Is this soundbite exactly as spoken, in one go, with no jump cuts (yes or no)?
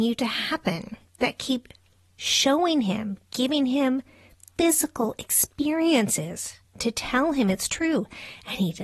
no